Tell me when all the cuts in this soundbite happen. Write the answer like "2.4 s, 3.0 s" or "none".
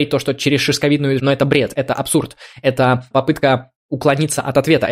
1.2 s, 3.1 s